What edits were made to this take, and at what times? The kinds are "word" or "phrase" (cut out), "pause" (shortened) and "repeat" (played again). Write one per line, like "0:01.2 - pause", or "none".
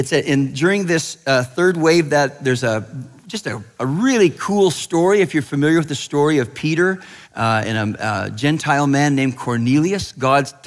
0:07.2 - pause